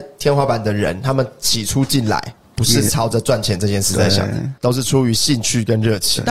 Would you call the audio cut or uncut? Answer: uncut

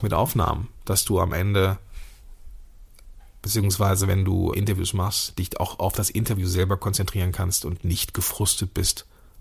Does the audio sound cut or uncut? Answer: cut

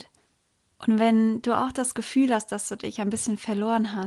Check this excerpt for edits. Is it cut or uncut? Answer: uncut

